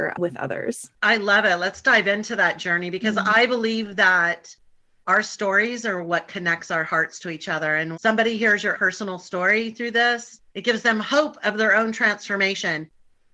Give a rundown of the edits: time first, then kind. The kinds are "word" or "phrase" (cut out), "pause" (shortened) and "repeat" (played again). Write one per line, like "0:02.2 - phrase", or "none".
0:01.0 - pause
0:07.9 - word
0:08.7 - word
0:10.5 - pause